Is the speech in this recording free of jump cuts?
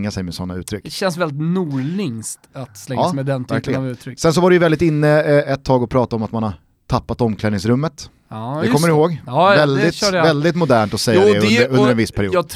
yes; 0 cuts

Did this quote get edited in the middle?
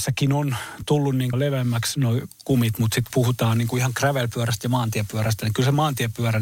yes; 2 cuts; at 1.3 s, 3.1 s

